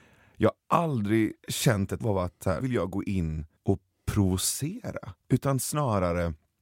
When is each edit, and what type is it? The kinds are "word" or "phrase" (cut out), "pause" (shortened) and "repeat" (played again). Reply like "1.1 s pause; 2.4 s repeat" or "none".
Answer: 1.4 s pause; 2.0 s word; 2.6 s word; 3.6 s pause; 5.2 s pause